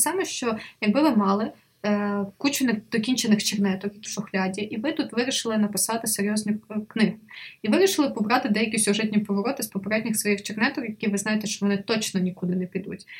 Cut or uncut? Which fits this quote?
cut